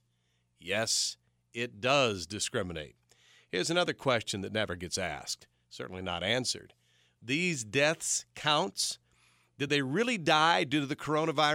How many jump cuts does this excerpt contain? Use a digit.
0